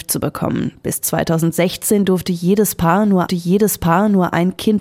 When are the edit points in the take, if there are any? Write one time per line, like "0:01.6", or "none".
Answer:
0:03.3